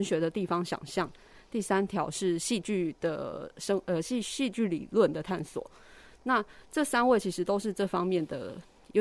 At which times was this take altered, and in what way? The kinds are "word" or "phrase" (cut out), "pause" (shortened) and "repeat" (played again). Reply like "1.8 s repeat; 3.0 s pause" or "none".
none